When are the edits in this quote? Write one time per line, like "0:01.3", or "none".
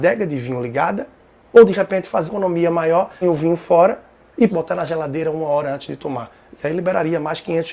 0:02.3
0:03.2
0:04.5